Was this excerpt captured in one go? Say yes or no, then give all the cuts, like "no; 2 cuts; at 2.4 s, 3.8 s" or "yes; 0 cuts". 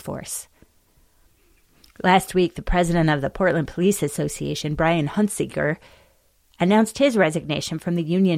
yes; 0 cuts